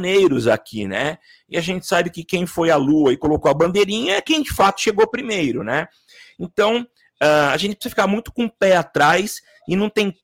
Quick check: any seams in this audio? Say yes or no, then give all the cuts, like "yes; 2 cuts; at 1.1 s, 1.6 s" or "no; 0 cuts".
no; 0 cuts